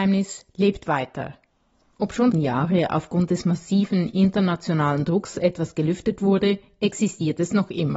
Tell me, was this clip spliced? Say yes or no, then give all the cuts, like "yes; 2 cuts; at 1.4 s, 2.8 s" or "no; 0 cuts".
yes; 1 cut; at 2.3 s